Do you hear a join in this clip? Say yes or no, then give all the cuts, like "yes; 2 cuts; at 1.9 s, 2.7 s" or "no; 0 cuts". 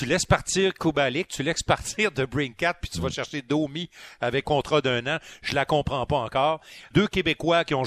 yes; 2 cuts; at 4.4 s, 6.9 s